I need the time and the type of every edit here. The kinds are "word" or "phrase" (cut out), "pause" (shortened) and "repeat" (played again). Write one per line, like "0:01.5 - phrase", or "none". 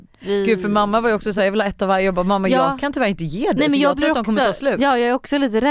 none